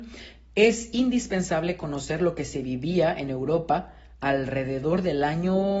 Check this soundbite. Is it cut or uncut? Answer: uncut